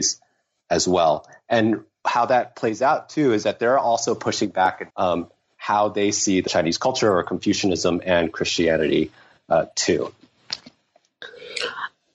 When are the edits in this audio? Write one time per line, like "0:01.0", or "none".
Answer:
0:04.9
0:06.5